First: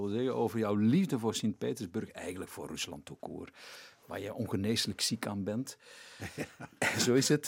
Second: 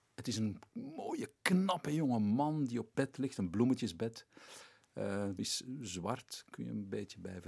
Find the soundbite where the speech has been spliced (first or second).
second